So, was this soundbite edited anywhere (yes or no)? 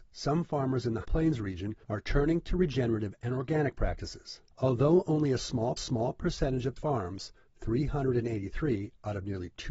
yes